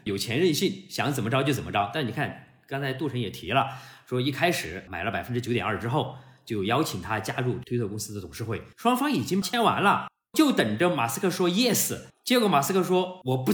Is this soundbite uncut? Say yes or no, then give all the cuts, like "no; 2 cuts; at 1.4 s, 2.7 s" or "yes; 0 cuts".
yes; 0 cuts